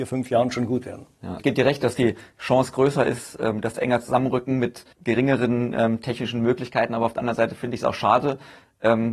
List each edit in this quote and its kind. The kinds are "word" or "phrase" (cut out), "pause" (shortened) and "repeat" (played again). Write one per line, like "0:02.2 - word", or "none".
0:01.4 - word
0:03.7 - phrase
0:04.9 - pause